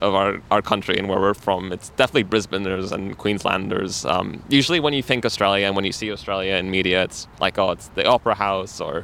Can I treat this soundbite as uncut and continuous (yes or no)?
no